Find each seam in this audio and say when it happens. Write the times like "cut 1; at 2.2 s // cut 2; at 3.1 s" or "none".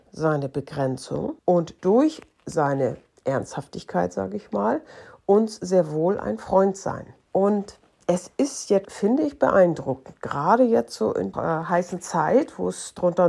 cut 1; at 1.4 s // cut 2; at 8.8 s // cut 3; at 11.3 s

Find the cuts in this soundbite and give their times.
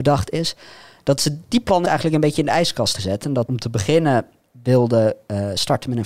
cut 1; at 1.8 s // cut 2; at 3.0 s // cut 3; at 3.5 s

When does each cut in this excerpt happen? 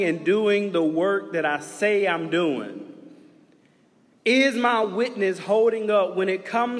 none

